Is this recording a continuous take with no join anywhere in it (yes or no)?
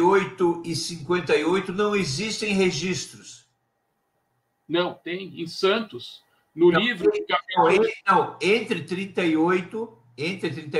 yes